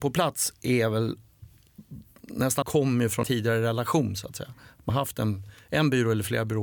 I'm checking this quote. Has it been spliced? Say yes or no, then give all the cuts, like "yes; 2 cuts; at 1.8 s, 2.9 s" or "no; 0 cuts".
yes; 3 cuts; at 2.6 s, 3.2 s, 4.9 s